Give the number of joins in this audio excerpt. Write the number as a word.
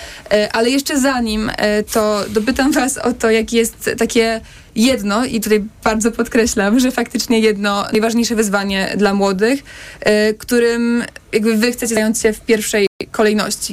zero